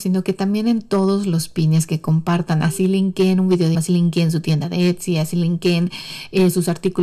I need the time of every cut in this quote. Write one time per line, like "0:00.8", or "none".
0:03.7